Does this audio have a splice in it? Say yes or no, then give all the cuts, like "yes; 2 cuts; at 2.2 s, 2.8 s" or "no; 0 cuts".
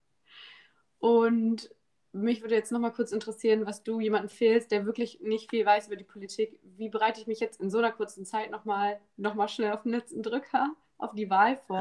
no; 0 cuts